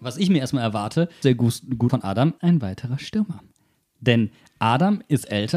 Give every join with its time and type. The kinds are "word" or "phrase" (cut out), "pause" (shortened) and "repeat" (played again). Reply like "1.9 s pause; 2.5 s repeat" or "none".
1.2 s word; 1.9 s word; 2.4 s word